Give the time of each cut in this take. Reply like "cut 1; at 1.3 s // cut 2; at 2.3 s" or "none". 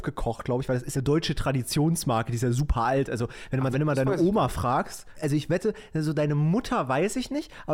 cut 1; at 0.9 s // cut 2; at 3.7 s // cut 3; at 5.1 s